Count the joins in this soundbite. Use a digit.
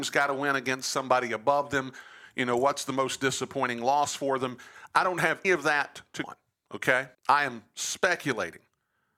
3